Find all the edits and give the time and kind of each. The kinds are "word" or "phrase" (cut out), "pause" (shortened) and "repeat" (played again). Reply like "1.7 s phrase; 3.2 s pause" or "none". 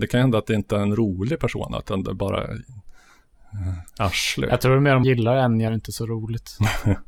5.0 s word; 5.7 s phrase